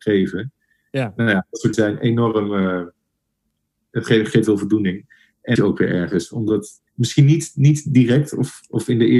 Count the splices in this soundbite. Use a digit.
4